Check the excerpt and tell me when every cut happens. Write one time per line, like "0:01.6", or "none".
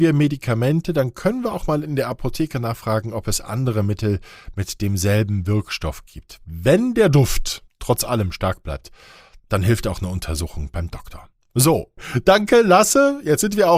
none